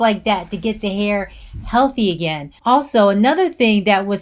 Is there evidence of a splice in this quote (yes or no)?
yes